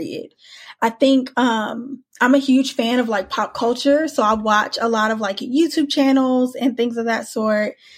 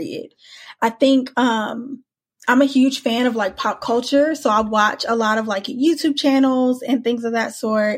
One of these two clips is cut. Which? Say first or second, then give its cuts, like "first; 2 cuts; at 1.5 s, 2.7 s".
first; 1 cut; at 2.1 s